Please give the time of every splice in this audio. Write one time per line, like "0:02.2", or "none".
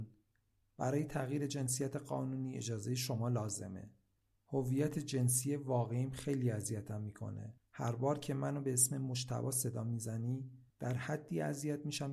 0:07.6